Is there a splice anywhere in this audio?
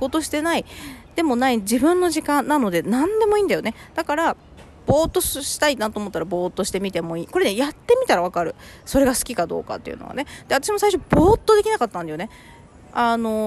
no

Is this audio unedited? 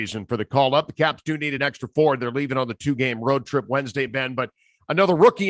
yes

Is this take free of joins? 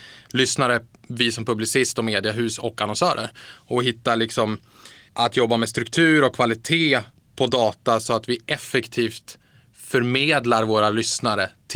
yes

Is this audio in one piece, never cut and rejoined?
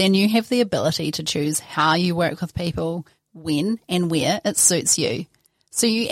yes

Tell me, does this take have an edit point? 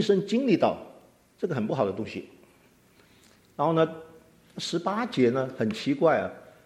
no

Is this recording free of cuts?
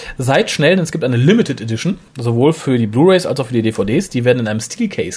no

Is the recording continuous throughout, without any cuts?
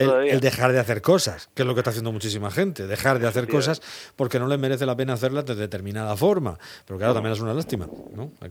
yes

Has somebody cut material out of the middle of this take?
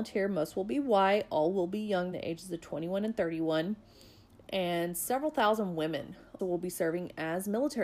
yes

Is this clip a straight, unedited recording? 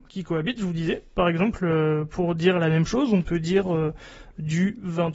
yes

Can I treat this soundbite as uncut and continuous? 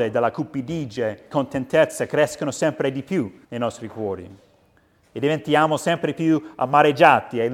no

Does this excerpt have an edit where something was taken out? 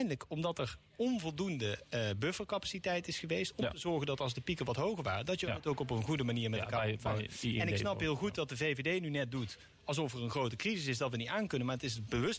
no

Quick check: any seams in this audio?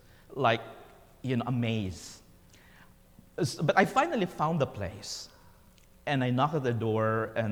no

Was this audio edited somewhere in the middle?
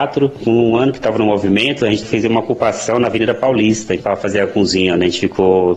no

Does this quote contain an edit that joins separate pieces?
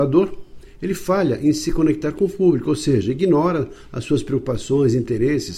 no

